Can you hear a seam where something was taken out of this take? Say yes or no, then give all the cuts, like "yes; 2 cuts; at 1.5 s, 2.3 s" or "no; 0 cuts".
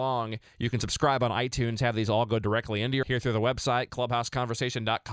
yes; 1 cut; at 3.0 s